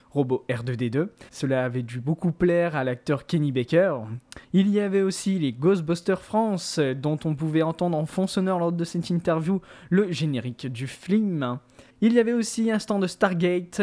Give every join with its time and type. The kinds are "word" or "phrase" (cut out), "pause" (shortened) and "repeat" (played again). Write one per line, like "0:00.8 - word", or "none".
0:01.3 - pause
0:04.4 - pause
0:11.9 - pause